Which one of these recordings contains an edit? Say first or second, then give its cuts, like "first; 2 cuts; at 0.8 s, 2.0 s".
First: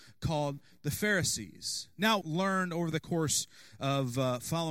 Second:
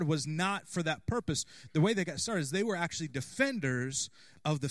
first; 1 cut; at 2.2 s